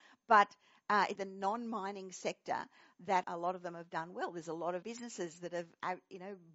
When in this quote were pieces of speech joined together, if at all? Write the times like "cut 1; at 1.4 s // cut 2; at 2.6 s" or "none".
cut 1; at 1.2 s // cut 2; at 3.2 s // cut 3; at 4.8 s

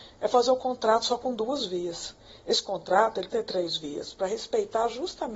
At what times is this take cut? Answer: cut 1; at 3.3 s

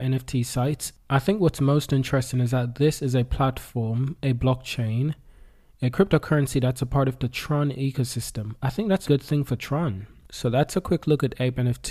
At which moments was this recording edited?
cut 1; at 9.1 s

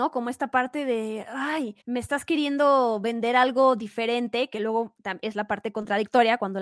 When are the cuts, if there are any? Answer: cut 1; at 1.8 s

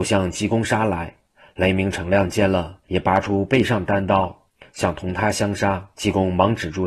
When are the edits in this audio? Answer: cut 1; at 2.8 s // cut 2; at 5.9 s

